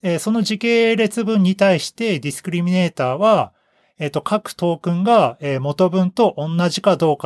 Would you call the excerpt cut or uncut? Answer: uncut